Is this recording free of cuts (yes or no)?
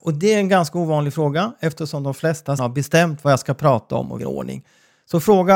no